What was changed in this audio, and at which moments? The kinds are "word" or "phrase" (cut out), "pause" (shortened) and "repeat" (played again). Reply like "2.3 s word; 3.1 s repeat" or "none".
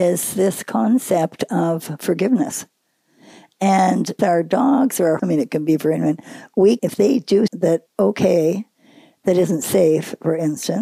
4.2 s word; 5.2 s word; 6.8 s word; 7.5 s word; 7.9 s word